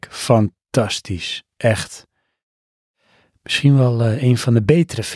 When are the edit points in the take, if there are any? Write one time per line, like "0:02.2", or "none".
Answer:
none